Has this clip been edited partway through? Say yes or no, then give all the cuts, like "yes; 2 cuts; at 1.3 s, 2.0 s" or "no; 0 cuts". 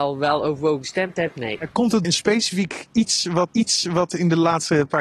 yes; 2 cuts; at 2.0 s, 3.5 s